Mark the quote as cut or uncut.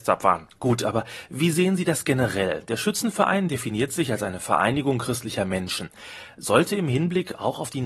uncut